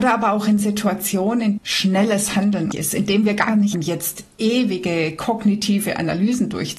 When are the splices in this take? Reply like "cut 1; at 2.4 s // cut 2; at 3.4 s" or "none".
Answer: cut 1; at 1.6 s // cut 2; at 2.7 s // cut 3; at 3.7 s